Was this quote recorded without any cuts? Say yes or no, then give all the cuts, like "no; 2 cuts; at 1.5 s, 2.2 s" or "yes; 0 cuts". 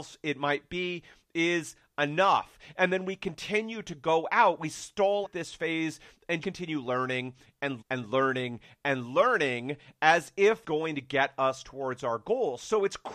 no; 4 cuts; at 5.2 s, 6.4 s, 7.8 s, 10.6 s